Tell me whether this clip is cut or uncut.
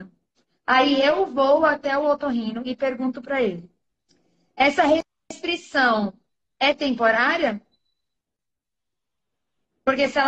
uncut